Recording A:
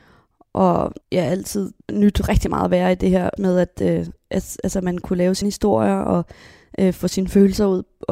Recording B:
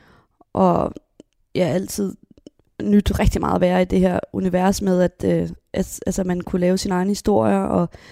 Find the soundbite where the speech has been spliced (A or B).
A